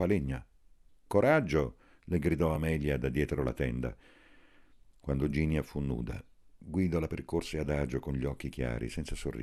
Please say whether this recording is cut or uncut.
uncut